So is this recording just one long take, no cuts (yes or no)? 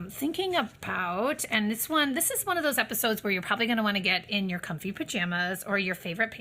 yes